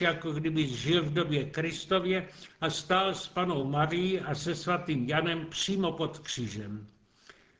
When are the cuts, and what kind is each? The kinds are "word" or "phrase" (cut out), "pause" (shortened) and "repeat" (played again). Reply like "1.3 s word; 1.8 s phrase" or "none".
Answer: none